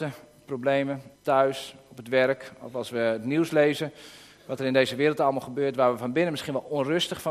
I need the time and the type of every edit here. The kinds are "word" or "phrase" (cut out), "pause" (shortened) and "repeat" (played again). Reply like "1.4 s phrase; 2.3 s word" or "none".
1.2 s pause